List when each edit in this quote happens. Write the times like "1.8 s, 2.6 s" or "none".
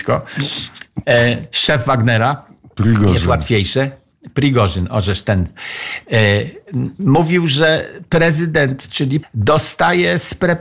9.2 s